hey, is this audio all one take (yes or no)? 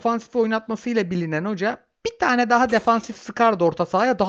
yes